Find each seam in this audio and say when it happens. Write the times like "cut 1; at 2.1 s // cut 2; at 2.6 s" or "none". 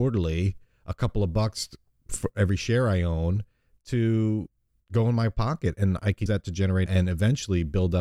cut 1; at 6.3 s // cut 2; at 6.9 s